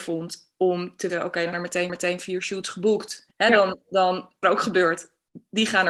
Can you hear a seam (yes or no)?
yes